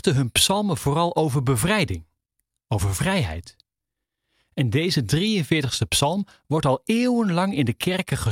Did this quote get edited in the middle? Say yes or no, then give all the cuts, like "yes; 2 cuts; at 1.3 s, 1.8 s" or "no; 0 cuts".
no; 0 cuts